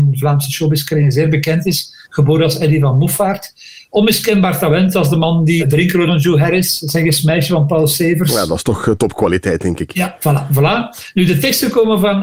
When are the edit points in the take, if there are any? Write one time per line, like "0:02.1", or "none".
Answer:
0:02.0
0:05.6
0:06.1